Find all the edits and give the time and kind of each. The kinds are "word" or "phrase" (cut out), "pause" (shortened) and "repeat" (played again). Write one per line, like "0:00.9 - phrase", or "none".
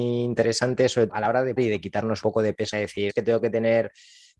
0:01.1 - word
0:01.6 - word
0:02.2 - word
0:02.7 - word
0:03.1 - word